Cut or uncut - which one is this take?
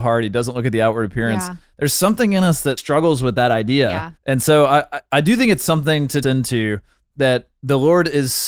cut